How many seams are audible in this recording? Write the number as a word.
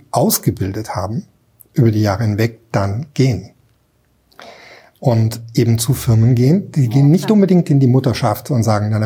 zero